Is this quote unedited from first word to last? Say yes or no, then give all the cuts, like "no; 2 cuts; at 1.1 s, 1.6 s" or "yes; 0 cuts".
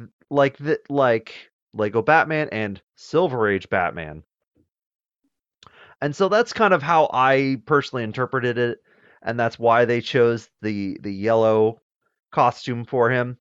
yes; 0 cuts